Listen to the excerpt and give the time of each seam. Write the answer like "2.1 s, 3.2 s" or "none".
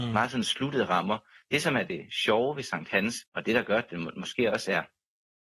3.3 s